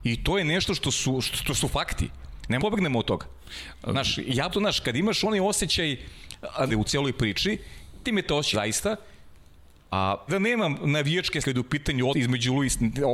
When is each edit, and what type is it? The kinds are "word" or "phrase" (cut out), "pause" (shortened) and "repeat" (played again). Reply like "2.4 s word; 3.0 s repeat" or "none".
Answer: 1.3 s word; 2.6 s word; 4.5 s word; 6.7 s word; 8.0 s word; 8.5 s word; 10.3 s word; 11.4 s word; 12.1 s word